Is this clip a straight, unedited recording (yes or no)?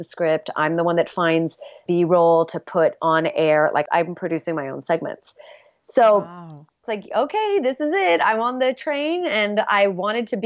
yes